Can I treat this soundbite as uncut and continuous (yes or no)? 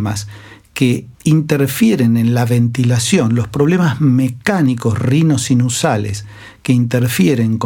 no